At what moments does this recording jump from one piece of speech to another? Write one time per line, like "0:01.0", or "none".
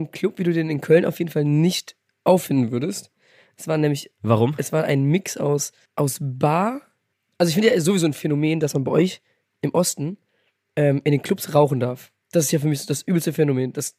none